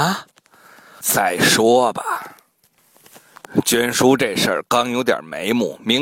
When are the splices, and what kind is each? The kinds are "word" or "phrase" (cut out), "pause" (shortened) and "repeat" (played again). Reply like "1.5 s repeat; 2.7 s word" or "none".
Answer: 1.0 s word